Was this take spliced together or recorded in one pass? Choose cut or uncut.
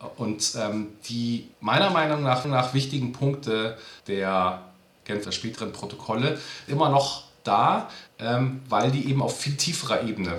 cut